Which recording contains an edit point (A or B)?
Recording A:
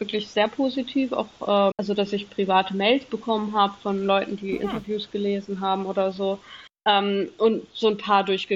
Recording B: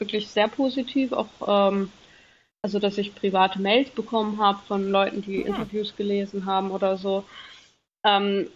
A